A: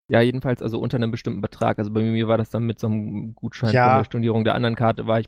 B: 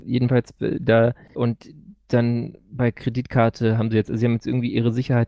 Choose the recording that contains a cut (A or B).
B